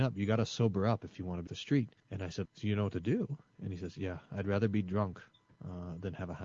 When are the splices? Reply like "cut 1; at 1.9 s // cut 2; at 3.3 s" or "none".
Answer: cut 1; at 1.5 s // cut 2; at 2.0 s // cut 3; at 2.5 s